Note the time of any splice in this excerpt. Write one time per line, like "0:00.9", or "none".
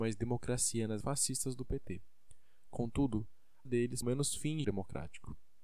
0:01.0
0:03.7
0:04.0
0:04.6